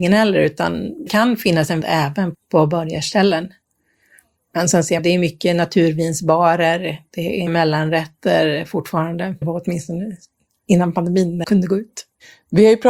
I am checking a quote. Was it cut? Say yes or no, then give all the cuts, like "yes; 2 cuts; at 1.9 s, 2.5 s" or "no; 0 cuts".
yes; 7 cuts; at 1.1 s, 1.8 s, 2.3 s, 5.0 s, 7.5 s, 9.4 s, 11.4 s